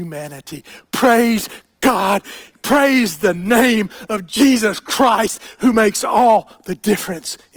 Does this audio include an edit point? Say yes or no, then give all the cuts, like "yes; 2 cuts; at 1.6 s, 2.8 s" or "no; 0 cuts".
no; 0 cuts